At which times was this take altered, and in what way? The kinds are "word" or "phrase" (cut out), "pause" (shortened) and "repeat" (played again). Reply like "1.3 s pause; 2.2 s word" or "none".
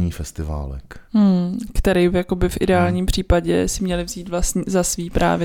1.1 s pause